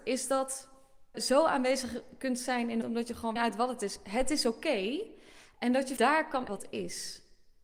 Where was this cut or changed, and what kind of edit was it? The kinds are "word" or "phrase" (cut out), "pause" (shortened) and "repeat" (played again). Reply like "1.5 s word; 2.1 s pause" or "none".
1.1 s word; 2.8 s word; 3.4 s phrase; 6.0 s word; 6.5 s word